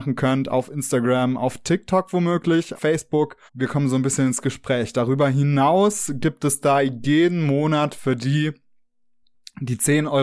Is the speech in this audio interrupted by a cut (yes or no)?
yes